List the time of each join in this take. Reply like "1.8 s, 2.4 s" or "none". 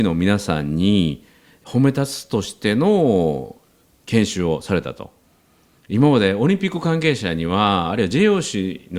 none